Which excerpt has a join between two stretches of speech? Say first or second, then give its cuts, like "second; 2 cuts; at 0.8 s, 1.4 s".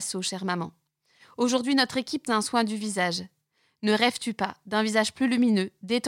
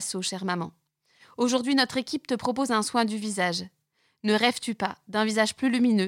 first; 1 cut; at 2.3 s